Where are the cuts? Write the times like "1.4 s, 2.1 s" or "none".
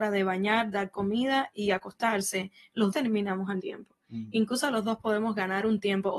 2.9 s, 3.6 s